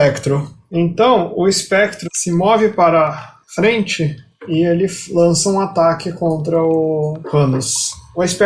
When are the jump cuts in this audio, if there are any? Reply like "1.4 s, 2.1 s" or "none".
3.4 s

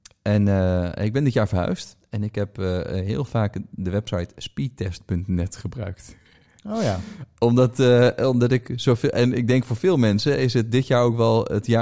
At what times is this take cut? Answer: none

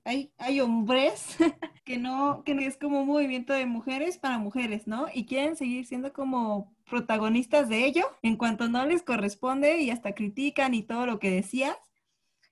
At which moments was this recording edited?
1.8 s, 2.6 s, 8.2 s

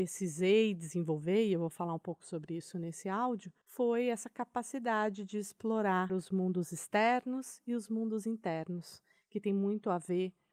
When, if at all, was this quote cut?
none

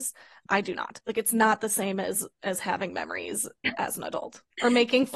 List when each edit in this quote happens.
none

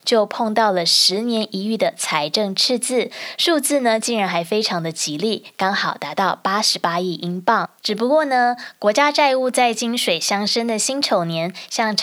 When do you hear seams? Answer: 7.8 s

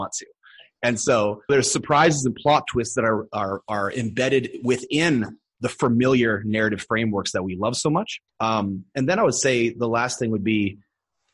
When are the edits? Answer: 1.5 s, 8.3 s

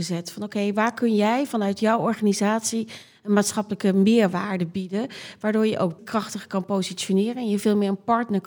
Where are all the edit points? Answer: 6.0 s

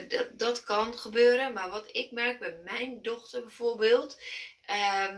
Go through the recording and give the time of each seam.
none

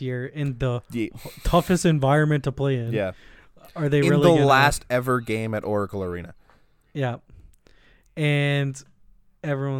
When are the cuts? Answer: none

